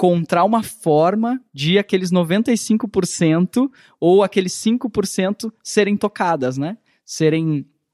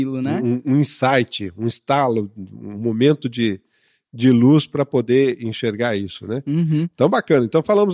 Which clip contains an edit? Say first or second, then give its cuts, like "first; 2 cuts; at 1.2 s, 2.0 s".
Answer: first; 1 cut; at 1.5 s